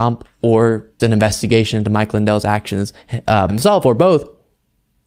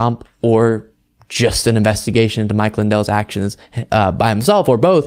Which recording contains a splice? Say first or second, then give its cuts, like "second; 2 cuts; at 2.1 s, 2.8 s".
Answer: first; 2 cuts; at 1.0 s, 3.5 s